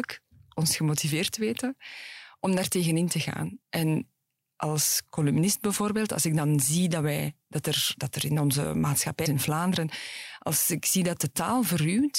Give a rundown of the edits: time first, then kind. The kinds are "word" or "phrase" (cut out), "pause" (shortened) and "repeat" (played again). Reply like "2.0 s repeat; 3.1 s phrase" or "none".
3.6 s pause; 9.3 s word